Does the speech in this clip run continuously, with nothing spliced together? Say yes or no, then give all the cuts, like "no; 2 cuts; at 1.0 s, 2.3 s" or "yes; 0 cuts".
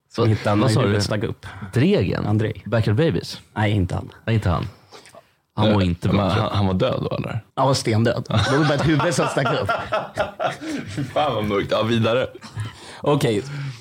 no; 1 cut; at 7.5 s